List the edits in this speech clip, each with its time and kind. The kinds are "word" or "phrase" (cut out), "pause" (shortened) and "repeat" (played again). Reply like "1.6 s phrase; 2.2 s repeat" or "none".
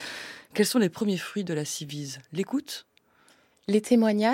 none